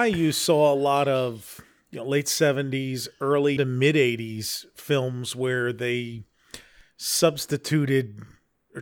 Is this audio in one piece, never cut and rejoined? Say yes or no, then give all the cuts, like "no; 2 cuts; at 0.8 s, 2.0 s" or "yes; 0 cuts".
no; 1 cut; at 3.6 s